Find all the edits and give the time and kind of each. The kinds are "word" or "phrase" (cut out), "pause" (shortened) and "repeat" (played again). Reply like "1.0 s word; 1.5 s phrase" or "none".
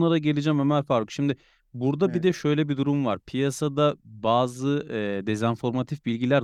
none